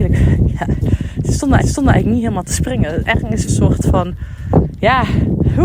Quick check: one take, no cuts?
no; 2 cuts; at 1.6 s, 3.5 s

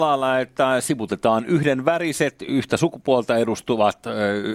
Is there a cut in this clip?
no; 0 cuts

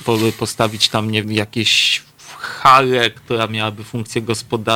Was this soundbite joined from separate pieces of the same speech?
yes; 1 cut; at 1.2 s

